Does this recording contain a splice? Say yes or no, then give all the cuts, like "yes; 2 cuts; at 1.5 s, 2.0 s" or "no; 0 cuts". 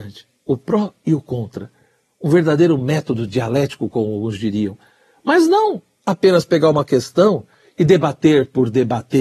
no; 0 cuts